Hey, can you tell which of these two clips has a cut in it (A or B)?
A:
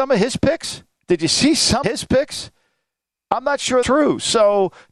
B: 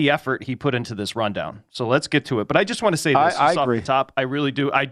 A